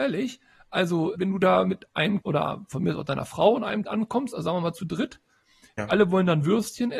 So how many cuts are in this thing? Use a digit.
4